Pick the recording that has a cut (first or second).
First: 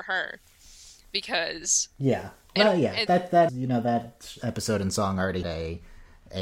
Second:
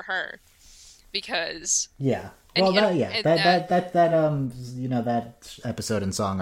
first